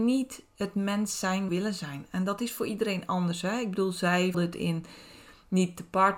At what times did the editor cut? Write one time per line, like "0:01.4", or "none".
0:01.5
0:04.3